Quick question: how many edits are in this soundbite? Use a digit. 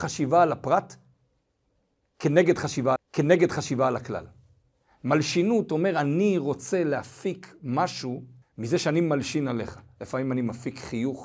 2